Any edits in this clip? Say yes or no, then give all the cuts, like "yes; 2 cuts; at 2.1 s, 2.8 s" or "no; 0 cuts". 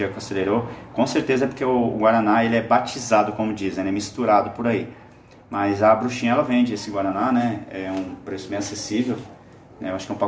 no; 0 cuts